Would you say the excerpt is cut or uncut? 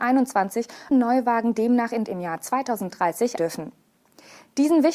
cut